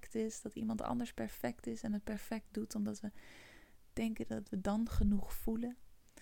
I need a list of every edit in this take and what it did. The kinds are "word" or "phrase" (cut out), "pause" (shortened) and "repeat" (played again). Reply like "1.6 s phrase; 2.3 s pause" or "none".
none